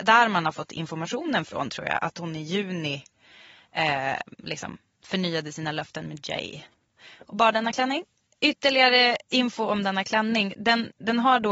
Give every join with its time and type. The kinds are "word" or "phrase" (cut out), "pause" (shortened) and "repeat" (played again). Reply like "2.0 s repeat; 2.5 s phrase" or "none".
none